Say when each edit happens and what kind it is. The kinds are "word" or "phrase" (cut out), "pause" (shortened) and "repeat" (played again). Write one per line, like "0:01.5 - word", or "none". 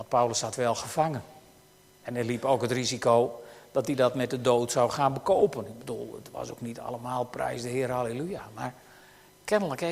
none